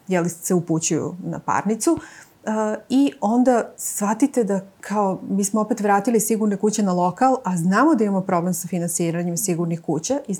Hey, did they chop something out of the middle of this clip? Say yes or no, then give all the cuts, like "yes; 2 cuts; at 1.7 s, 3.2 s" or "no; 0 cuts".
no; 0 cuts